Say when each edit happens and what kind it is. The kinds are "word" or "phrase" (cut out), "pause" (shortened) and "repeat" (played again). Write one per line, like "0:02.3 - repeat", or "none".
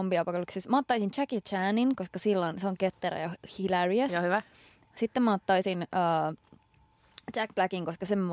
none